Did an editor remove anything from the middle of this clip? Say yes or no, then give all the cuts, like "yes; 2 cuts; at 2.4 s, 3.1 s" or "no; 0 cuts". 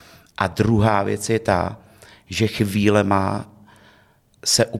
no; 0 cuts